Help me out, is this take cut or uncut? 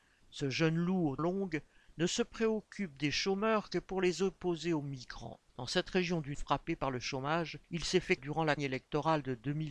cut